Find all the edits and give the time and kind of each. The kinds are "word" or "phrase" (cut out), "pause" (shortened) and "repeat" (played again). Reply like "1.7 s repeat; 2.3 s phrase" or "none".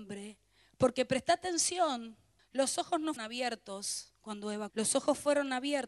2.4 s pause; 3.2 s word; 4.7 s word

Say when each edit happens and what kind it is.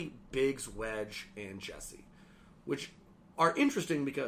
none

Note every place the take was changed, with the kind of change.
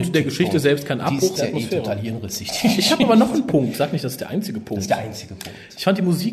1.4 s word

